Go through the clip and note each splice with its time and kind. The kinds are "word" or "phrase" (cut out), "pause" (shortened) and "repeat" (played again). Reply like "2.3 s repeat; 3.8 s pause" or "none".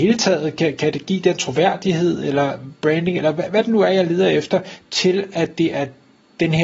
none